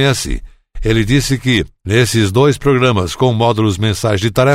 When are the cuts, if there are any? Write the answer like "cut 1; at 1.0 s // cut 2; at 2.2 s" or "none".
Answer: none